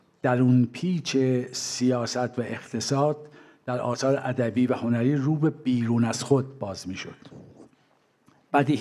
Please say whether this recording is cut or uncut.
uncut